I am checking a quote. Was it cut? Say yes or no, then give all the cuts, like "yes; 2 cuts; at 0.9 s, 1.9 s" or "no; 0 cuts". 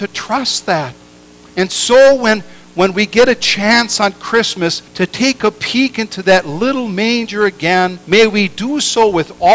yes; 3 cuts; at 1.2 s, 4.9 s, 8.0 s